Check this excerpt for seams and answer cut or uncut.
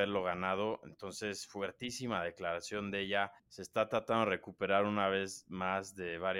cut